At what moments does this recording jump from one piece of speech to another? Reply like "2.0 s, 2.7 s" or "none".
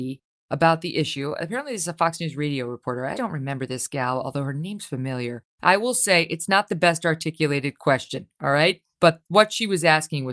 3.1 s, 5.5 s, 8.9 s